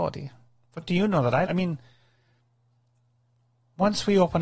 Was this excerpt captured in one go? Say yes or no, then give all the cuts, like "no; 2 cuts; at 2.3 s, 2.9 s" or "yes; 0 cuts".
no; 1 cut; at 1.5 s